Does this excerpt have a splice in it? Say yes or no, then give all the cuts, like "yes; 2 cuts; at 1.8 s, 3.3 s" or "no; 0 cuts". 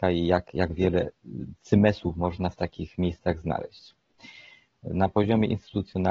no; 0 cuts